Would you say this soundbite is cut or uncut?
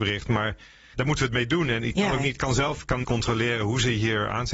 cut